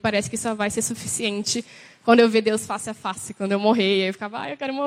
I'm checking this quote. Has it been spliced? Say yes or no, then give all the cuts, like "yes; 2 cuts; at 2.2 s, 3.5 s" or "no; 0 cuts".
no; 0 cuts